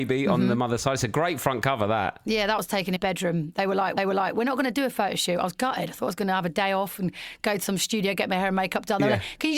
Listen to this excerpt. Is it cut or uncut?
cut